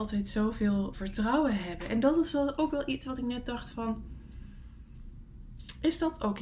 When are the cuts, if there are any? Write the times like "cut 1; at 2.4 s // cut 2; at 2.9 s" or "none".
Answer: cut 1; at 0.9 s